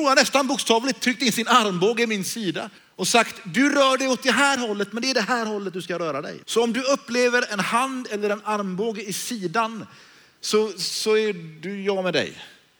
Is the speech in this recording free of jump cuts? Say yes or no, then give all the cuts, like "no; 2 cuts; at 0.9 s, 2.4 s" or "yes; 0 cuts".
no; 2 cuts; at 2.8 s, 6.4 s